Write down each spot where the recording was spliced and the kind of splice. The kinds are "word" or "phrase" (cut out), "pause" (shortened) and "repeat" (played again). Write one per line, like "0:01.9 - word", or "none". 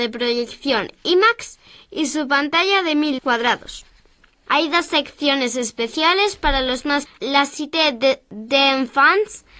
0:03.2 - word
0:07.1 - word

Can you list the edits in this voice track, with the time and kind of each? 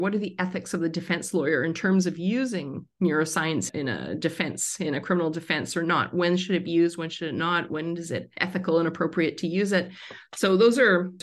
0:08.3 - pause

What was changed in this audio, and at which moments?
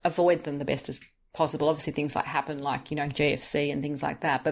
none

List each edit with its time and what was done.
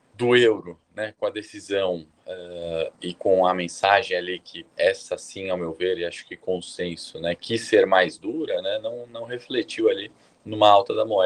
0:04.7 - pause

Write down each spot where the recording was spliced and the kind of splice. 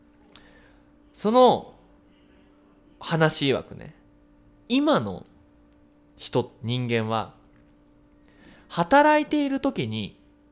none

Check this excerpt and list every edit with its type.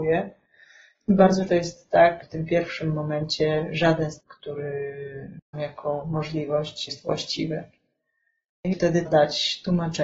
0:01.5 - word
0:02.2 - word
0:04.2 - word
0:05.5 - word
0:06.9 - word
0:08.7 - word
0:09.1 - word

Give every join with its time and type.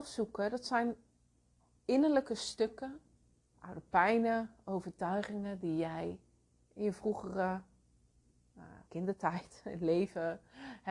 0:03.1 - pause
0:08.8 - pause

